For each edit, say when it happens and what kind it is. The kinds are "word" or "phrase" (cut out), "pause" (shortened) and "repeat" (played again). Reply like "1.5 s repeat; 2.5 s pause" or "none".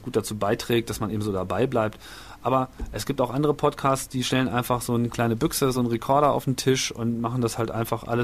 none